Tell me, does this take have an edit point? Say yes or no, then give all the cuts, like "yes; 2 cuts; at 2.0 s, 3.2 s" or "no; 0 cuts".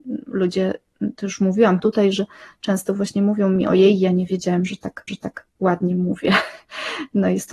yes; 2 cuts; at 1.8 s, 5.1 s